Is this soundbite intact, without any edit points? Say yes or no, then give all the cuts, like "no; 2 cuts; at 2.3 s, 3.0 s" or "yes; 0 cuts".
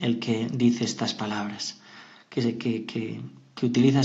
yes; 0 cuts